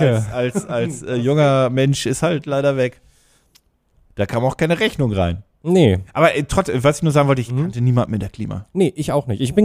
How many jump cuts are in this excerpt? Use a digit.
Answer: 0